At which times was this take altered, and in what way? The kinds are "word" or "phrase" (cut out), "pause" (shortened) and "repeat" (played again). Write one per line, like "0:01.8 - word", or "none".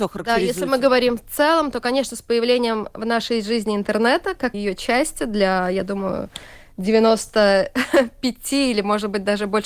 0:04.5 - word